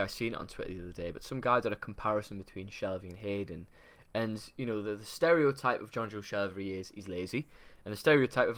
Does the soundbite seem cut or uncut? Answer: uncut